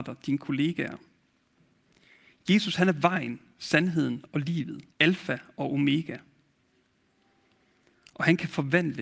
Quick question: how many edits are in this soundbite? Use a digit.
1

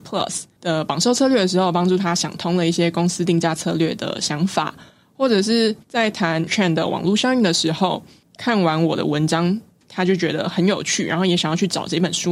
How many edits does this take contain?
2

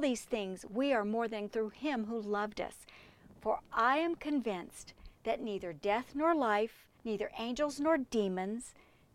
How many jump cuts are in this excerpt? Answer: 2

